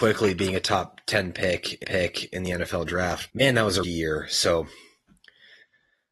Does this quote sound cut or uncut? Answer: cut